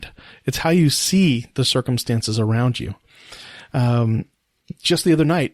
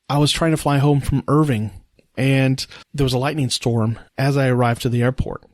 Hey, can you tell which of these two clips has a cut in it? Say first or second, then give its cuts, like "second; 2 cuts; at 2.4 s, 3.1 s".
second; 2 cuts; at 2.8 s, 4.1 s